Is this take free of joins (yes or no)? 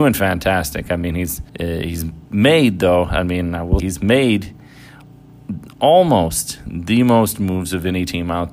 no